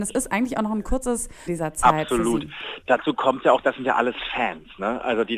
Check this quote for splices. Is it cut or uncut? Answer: cut